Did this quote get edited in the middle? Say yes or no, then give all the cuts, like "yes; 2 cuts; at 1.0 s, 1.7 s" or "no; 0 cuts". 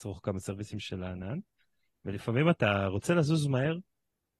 no; 0 cuts